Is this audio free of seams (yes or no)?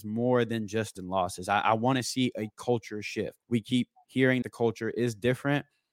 no